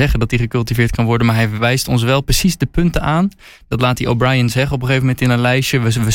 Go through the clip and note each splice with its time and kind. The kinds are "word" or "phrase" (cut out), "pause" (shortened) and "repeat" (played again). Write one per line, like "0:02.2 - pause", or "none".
none